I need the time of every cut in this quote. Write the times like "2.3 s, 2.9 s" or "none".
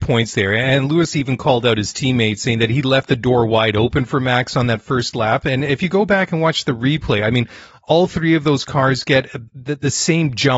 9.5 s